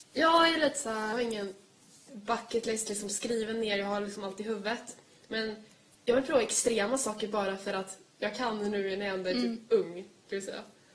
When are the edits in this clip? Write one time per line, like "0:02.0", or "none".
0:01.1